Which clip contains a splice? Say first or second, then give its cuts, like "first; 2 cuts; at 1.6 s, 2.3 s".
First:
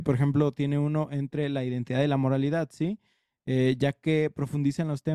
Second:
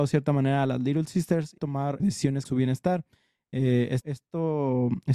second; 4 cuts; at 1.6 s, 2.0 s, 2.4 s, 4.0 s